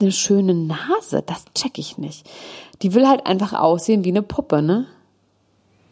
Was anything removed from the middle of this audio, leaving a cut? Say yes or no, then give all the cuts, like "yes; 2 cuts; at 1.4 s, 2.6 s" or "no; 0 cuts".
no; 0 cuts